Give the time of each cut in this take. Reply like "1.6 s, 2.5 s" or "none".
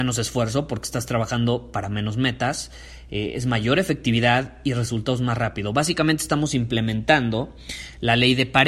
none